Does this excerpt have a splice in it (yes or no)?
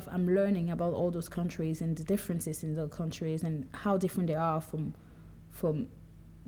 no